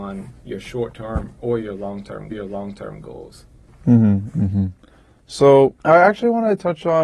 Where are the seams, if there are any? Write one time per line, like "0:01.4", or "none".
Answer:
0:02.3
0:05.8

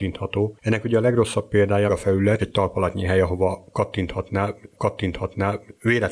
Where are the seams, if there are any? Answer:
0:01.9
0:02.4
0:04.7

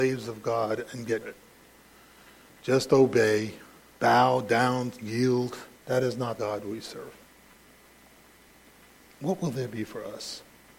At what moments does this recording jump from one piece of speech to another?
0:01.2
0:03.8
0:05.0
0:05.7
0:06.4

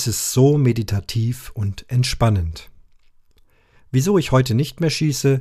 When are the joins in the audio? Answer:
none

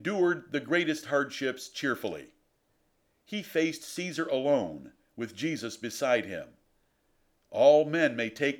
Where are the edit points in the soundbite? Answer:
none

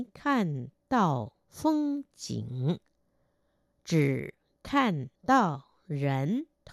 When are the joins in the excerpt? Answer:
0:05.2

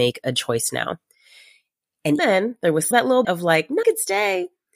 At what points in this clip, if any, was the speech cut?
0:02.2
0:02.9
0:03.2
0:03.8

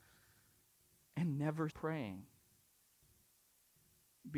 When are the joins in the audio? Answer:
0:01.7

